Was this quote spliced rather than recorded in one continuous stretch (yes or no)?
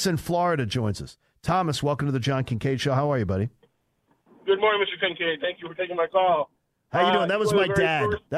no